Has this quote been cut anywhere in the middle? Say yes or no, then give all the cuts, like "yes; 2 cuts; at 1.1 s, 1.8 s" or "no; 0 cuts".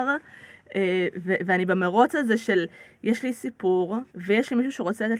yes; 1 cut; at 4.1 s